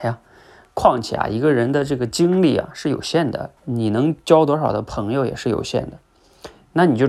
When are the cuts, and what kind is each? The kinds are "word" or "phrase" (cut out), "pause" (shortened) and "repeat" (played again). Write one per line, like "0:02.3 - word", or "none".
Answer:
0:03.6 - pause